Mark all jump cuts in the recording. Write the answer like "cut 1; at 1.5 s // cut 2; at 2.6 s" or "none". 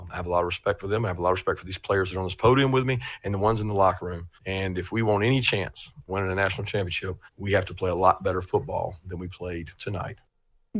cut 1; at 4.4 s // cut 2; at 6.1 s // cut 3; at 7.3 s // cut 4; at 9.7 s